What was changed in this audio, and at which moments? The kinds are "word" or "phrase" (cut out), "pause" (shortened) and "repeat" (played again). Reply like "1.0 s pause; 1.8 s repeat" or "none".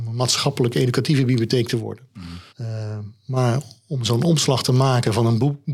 2.5 s pause